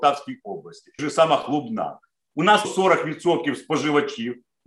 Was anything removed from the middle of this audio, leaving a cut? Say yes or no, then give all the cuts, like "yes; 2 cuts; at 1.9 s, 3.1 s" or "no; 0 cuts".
yes; 2 cuts; at 1.0 s, 2.6 s